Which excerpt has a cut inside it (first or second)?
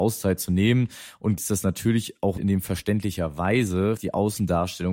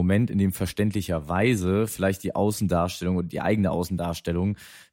first